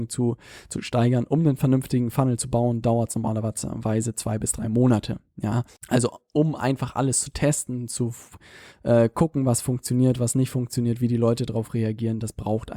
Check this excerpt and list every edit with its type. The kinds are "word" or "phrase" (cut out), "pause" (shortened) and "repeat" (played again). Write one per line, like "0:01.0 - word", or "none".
0:05.8 - pause